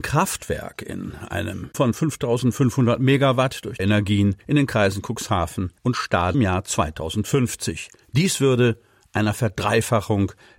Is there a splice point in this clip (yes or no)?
yes